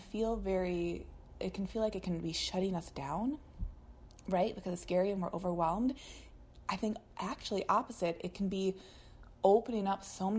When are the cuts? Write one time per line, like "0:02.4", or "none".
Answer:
none